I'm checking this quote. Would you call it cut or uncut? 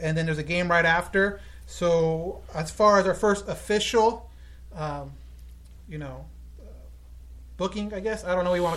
uncut